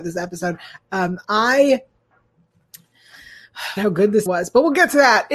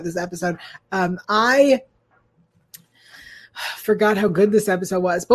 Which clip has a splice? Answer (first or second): first